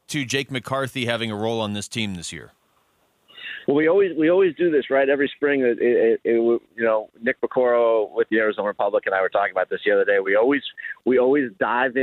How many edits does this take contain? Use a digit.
0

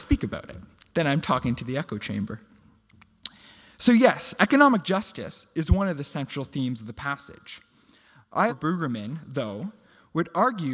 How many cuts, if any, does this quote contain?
2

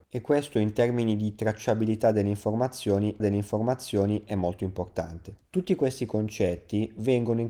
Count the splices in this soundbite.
2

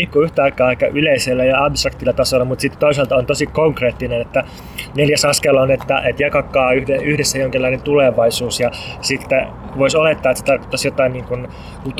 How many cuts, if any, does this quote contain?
0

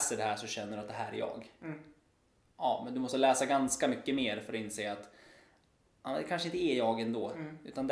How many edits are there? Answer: 0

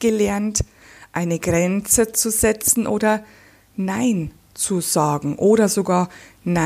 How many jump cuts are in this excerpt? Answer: 0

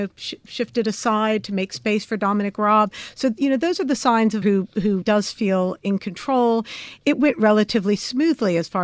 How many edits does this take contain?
2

